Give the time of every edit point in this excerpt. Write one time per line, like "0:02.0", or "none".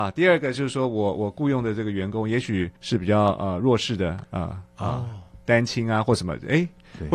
0:02.8